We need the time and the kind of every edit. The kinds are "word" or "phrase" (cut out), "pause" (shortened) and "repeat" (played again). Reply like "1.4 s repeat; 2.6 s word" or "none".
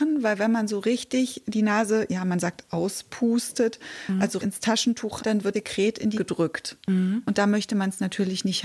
4.4 s word; 5.2 s word; 5.5 s word; 6.2 s word